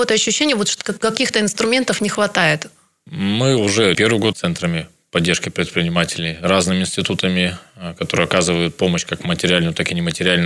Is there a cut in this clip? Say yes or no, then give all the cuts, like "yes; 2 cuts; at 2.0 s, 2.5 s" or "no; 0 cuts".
yes; 2 cuts; at 3.9 s, 4.3 s